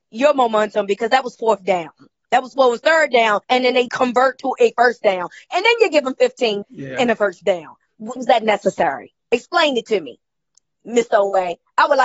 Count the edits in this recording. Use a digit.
4